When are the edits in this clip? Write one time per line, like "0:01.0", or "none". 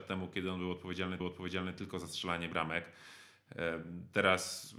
0:01.2